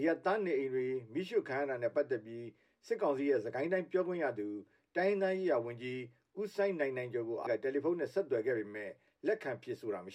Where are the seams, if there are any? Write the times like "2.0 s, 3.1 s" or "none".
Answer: 7.5 s